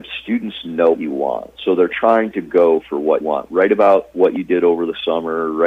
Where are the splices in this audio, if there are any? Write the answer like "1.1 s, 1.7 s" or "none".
0.9 s, 1.6 s, 3.2 s